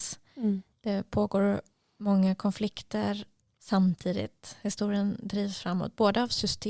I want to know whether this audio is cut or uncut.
uncut